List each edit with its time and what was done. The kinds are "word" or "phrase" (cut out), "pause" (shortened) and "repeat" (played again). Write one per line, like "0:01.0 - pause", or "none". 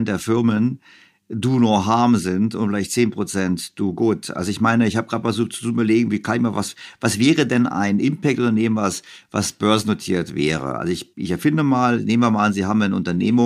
0:11.1 - pause